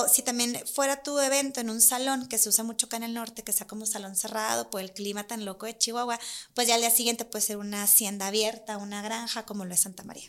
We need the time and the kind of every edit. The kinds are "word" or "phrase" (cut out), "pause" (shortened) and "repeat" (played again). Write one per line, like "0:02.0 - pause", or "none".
none